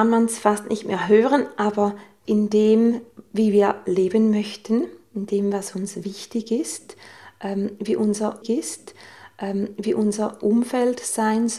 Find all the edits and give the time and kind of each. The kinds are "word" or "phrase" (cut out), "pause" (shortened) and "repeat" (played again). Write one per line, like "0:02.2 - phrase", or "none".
0:02.2 - word
0:08.4 - repeat